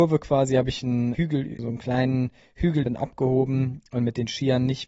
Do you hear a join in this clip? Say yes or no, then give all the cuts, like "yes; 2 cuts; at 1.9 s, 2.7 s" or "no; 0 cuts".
yes; 3 cuts; at 1.1 s, 1.6 s, 2.8 s